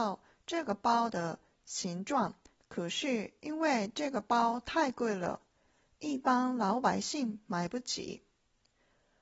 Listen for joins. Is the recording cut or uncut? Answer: uncut